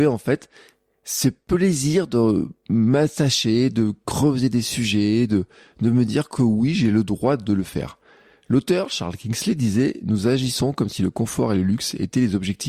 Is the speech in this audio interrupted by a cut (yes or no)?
no